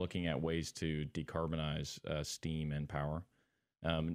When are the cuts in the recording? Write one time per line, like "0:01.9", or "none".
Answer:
none